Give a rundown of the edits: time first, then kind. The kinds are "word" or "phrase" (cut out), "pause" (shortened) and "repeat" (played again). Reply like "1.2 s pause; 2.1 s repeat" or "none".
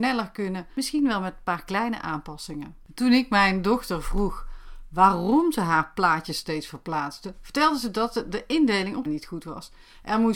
9.1 s word